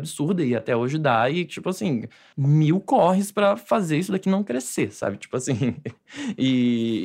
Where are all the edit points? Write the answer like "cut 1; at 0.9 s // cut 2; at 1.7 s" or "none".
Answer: none